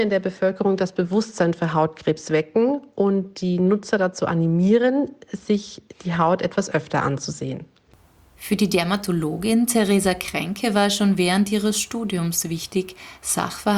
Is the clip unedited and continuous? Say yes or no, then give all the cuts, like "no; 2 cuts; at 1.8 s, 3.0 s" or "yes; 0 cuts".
yes; 0 cuts